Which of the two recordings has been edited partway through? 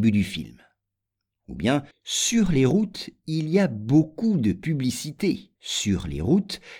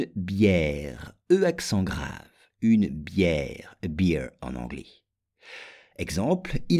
first; 2 cuts; at 1.9 s, 5.6 s

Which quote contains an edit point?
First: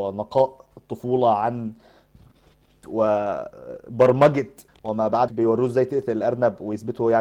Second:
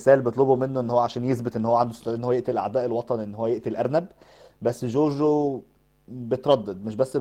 first; 3 cuts; at 2.8 s, 4.7 s, 5.3 s

